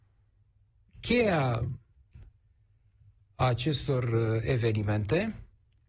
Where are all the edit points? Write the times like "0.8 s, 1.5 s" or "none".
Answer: none